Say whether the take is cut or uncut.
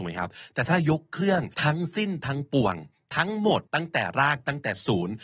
cut